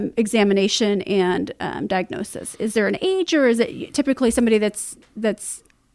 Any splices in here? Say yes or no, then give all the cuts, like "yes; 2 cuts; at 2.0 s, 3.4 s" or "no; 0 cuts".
yes; 1 cut; at 2.5 s